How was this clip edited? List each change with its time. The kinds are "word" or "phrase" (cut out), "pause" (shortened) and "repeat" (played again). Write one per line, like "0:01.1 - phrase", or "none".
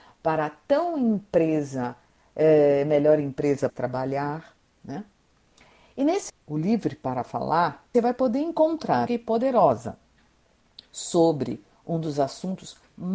0:03.7 - phrase
0:06.3 - word
0:07.9 - word
0:09.1 - phrase